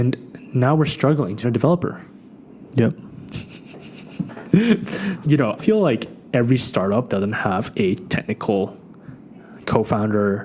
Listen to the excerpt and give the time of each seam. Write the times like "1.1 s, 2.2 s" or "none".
1.4 s, 5.2 s, 5.6 s, 7.1 s